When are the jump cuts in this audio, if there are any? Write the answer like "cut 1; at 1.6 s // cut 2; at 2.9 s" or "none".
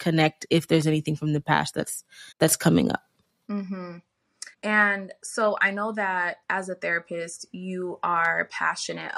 cut 1; at 2.3 s // cut 2; at 4.5 s // cut 3; at 6.4 s